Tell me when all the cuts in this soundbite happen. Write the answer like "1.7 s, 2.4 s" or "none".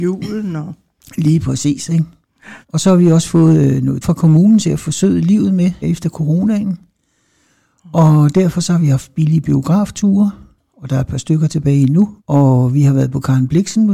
2.6 s, 4.0 s, 5.8 s, 12.2 s